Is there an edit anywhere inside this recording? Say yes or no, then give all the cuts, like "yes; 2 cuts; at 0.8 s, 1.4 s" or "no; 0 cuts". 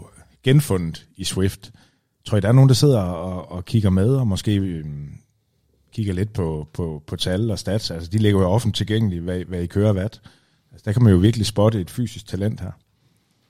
no; 0 cuts